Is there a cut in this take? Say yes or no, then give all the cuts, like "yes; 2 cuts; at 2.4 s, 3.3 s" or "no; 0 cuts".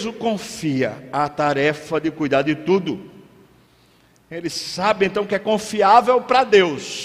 no; 0 cuts